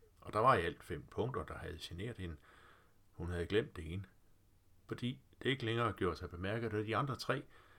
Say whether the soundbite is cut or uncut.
uncut